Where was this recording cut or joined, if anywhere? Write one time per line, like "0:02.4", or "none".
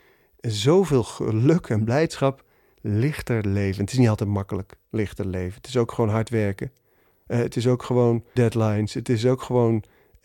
0:08.4